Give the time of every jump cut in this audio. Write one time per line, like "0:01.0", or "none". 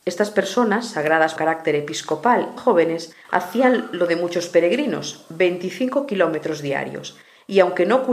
0:01.4
0:02.6
0:03.2